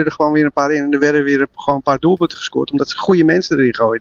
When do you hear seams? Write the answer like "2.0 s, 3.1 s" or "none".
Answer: none